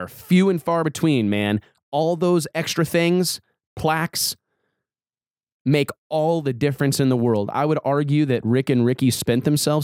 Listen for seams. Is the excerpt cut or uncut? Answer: uncut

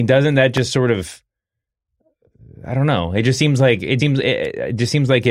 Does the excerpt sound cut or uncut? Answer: cut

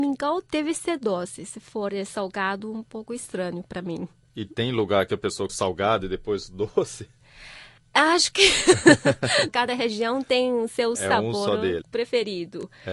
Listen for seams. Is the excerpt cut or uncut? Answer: cut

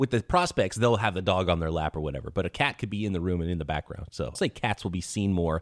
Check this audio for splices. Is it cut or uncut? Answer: cut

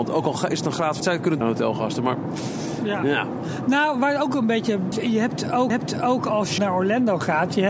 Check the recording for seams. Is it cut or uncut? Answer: cut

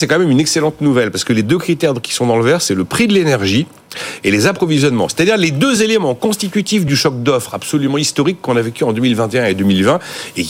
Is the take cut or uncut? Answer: uncut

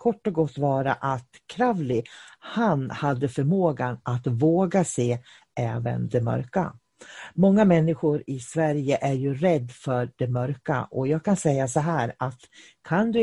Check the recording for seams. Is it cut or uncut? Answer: uncut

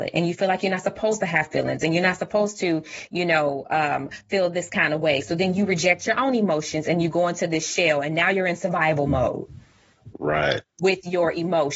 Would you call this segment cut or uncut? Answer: uncut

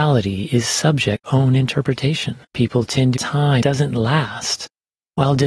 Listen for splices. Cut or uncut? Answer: cut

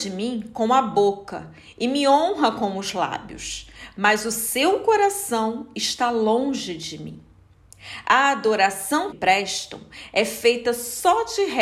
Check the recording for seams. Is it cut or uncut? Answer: cut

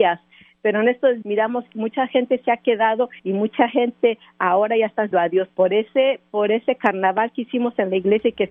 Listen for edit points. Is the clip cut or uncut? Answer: cut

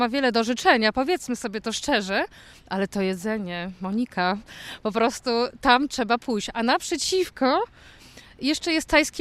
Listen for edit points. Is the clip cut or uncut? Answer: uncut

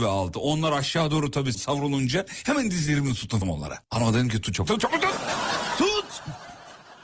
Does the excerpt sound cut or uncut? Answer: cut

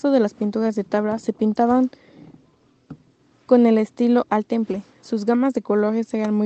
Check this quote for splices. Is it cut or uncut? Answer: uncut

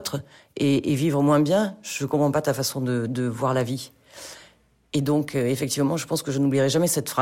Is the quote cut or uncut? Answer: uncut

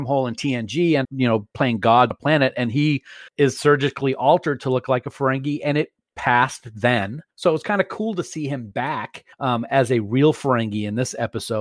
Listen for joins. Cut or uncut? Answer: cut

